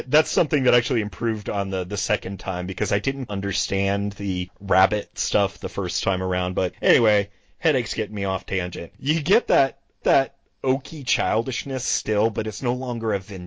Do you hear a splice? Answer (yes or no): yes